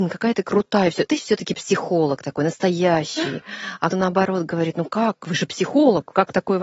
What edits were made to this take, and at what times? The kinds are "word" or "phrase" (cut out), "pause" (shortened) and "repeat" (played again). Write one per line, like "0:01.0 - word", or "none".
0:01.1 - word
0:03.9 - word